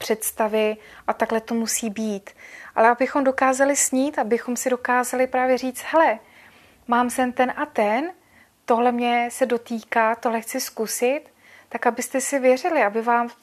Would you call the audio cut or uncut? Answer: uncut